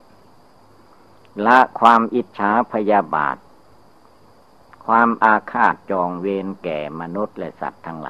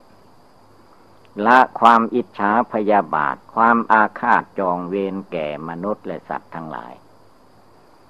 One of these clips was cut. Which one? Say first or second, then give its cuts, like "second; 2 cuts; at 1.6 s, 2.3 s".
second; 1 cut; at 3.4 s